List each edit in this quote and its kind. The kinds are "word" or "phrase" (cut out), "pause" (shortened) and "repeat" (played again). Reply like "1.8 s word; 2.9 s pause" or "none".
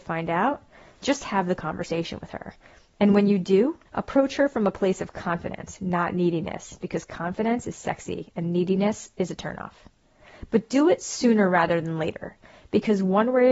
3.9 s pause